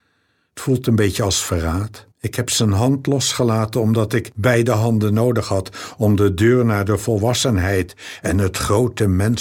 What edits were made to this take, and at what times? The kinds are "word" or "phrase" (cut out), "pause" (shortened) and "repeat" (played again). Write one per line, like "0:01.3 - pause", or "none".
0:02.1 - pause